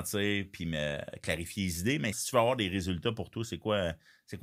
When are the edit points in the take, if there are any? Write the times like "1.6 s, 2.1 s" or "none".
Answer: 2.1 s